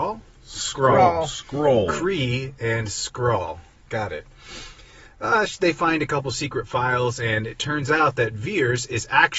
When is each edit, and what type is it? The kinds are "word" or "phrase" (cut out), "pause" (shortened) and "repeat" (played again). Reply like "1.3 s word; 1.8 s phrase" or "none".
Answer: none